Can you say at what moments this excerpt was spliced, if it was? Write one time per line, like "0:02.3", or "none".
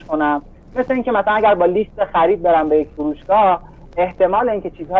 none